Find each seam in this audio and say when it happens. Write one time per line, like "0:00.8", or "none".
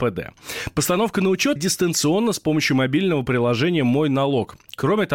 0:01.6